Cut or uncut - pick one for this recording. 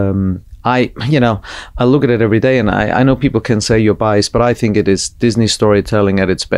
uncut